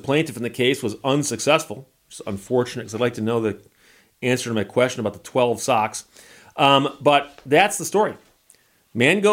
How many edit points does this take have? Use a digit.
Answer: 0